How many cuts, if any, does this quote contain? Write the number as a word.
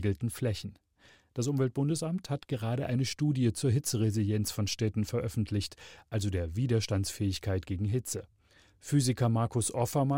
zero